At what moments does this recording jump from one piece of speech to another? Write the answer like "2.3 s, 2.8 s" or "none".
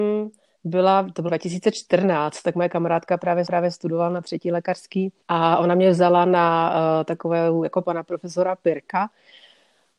1.3 s, 3.5 s, 5.2 s, 7.8 s